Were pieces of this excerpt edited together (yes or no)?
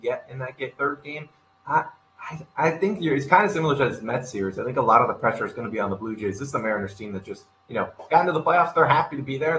no